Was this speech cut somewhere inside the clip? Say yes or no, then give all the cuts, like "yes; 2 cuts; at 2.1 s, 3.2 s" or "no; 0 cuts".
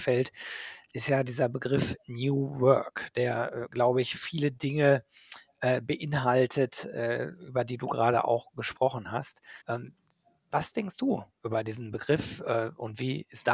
yes; 1 cut; at 9.6 s